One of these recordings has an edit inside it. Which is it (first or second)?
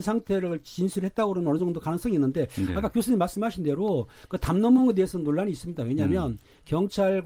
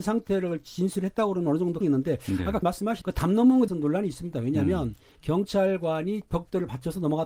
second